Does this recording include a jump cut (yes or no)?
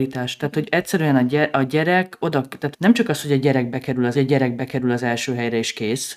yes